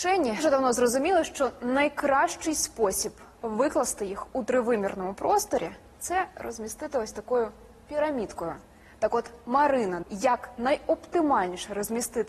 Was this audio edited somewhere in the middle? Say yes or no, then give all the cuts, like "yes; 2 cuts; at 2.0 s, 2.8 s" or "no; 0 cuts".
yes; 1 cut; at 10.0 s